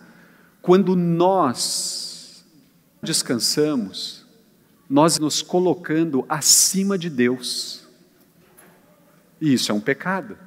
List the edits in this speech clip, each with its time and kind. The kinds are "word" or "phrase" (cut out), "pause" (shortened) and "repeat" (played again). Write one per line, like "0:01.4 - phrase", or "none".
0:03.0 - word
0:05.2 - word